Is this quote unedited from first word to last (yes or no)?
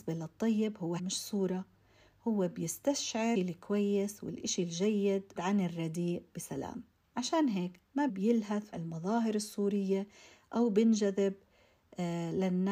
no